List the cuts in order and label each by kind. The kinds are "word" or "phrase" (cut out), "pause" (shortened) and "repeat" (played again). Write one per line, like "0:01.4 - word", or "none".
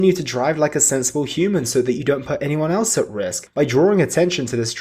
none